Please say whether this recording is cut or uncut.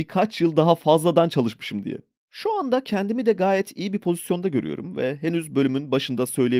uncut